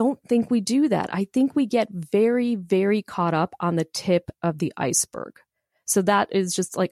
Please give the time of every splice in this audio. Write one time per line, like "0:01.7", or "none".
none